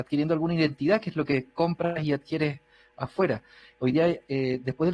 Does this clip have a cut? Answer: no; 0 cuts

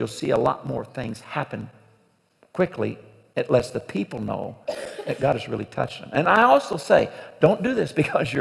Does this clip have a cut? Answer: no; 0 cuts

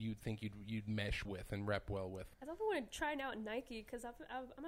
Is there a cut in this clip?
yes; 2 cuts; at 1.3 s, 2.3 s

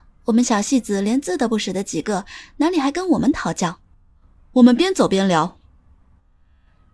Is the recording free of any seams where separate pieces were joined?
no; 1 cut; at 4.2 s

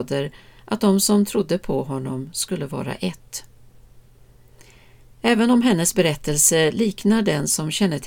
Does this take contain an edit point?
no; 0 cuts

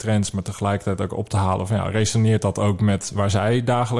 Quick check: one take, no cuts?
yes; 0 cuts

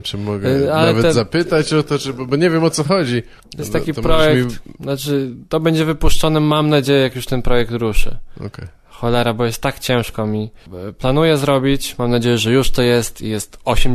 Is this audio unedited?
no; 1 cut; at 3.4 s

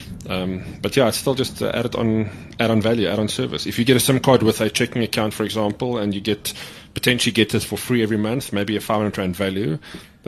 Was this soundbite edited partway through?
no; 0 cuts

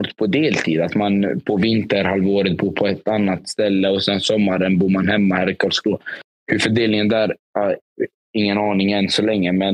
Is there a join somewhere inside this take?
no; 0 cuts

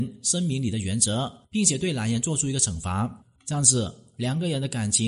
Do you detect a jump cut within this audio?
yes; 2 cuts; at 1.4 s, 3.4 s

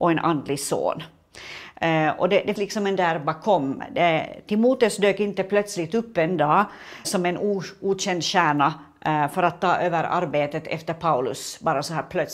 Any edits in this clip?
yes; 3 cuts; at 2.6 s, 3.0 s, 7.0 s

